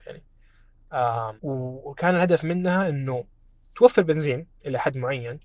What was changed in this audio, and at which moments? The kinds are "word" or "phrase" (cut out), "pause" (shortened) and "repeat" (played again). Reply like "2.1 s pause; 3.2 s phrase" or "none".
1.4 s pause